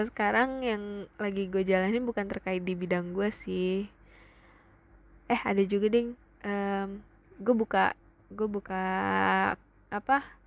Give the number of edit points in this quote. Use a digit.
0